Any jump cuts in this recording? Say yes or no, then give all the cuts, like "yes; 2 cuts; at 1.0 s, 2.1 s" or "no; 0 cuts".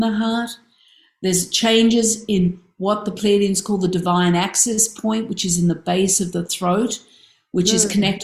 no; 0 cuts